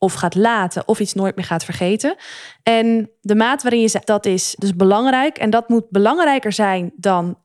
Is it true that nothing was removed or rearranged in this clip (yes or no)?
no